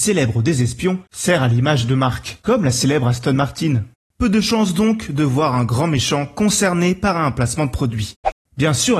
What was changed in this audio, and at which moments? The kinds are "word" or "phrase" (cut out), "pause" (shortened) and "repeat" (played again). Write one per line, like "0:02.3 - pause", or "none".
none

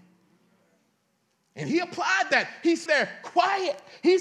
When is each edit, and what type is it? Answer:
0:02.9 - word

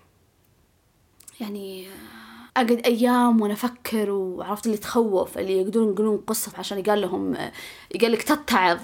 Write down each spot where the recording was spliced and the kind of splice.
0:02.5 - pause
0:04.6 - phrase
0:06.5 - word

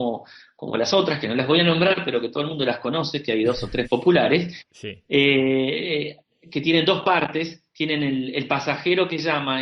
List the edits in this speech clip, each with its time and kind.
0:03.8 - word

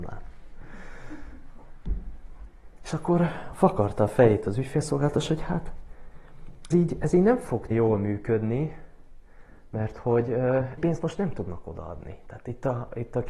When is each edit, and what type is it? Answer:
0:06.7 - word
0:07.7 - word
0:10.8 - word

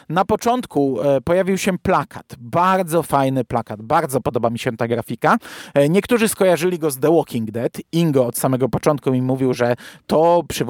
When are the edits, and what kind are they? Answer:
none

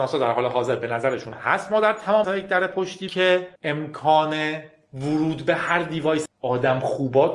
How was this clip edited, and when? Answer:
0:01.3 - word
0:02.2 - word
0:03.1 - word
0:03.6 - pause
0:06.3 - phrase

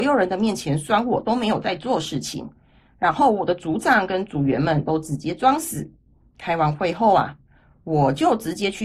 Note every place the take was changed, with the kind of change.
none

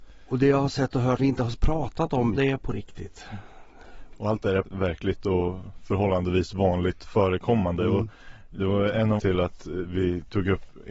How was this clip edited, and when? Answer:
0:01.2 - word
0:02.4 - word
0:04.6 - phrase
0:09.2 - word

